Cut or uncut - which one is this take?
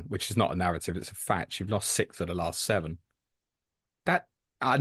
uncut